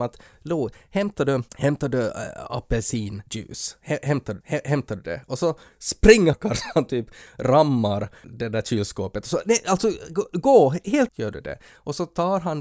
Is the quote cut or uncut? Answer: cut